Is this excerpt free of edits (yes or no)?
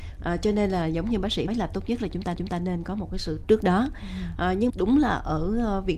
no